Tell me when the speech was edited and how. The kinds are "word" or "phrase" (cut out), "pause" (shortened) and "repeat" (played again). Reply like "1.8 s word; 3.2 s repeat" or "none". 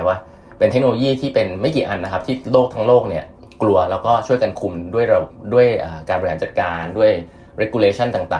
none